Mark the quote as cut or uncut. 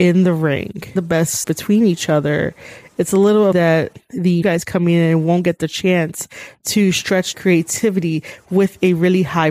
cut